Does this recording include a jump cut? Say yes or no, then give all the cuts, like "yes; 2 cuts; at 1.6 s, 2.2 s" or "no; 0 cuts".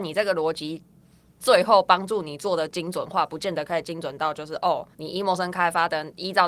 yes; 1 cut; at 4.9 s